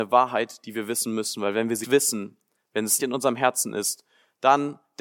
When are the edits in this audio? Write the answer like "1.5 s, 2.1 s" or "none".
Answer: 1.8 s, 3.0 s